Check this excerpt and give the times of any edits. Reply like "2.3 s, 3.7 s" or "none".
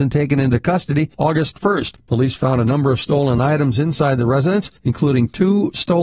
none